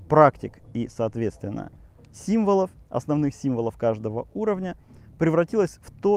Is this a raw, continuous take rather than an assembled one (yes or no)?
yes